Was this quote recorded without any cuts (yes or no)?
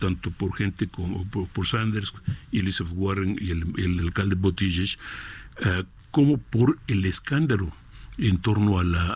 yes